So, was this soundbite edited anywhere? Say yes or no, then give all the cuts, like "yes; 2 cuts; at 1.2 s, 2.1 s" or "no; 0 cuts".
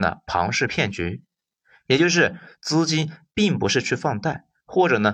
no; 0 cuts